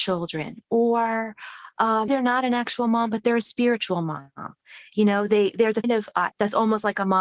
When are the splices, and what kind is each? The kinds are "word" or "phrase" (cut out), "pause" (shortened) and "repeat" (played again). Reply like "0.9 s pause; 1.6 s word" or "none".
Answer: 2.1 s word; 5.8 s word; 6.3 s word